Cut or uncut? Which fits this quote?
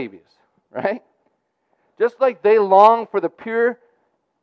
uncut